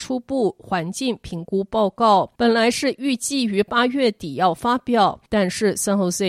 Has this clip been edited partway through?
yes; 2 cuts; at 2.3 s, 5.3 s

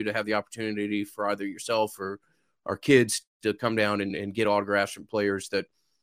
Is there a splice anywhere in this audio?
no; 0 cuts

